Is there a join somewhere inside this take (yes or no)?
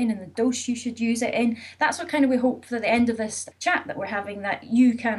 yes